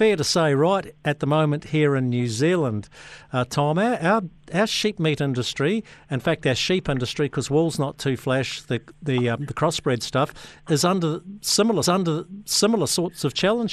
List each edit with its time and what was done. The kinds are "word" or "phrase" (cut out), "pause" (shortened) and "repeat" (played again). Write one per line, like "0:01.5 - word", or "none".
0:08.9 - word
0:11.8 - repeat